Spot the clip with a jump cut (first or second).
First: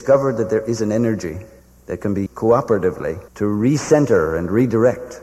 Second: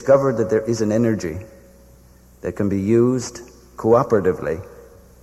first